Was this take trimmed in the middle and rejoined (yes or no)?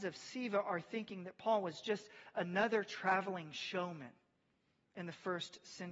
no